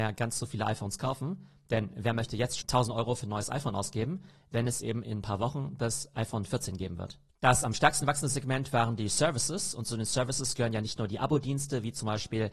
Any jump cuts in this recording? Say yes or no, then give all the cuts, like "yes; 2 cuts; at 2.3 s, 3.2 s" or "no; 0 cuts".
yes; 1 cut; at 2.6 s